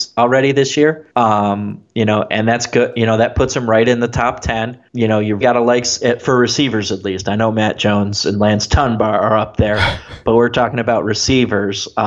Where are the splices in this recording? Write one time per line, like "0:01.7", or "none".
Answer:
0:01.1
0:04.9
0:05.4

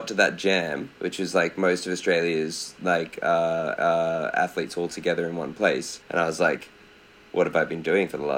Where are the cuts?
0:01.0
0:03.8
0:06.0

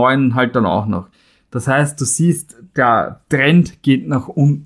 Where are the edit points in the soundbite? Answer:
none

